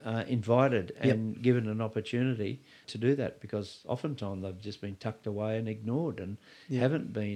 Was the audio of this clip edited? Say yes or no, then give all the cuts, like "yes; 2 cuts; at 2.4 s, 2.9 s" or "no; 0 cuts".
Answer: no; 0 cuts